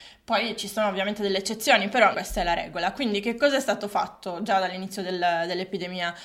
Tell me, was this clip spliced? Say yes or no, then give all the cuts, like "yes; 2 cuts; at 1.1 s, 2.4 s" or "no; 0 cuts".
yes; 1 cut; at 2.1 s